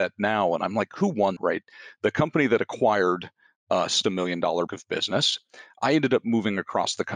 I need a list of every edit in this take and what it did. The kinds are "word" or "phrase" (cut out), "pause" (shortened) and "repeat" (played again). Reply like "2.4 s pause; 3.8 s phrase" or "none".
1.4 s word; 4.0 s word; 4.7 s word